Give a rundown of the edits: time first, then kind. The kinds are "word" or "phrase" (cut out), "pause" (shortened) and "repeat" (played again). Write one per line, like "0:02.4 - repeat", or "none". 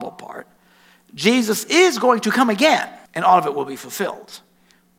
0:03.1 - pause